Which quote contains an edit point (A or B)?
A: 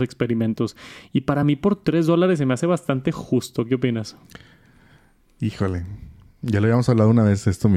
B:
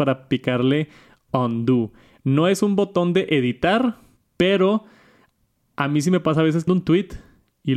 B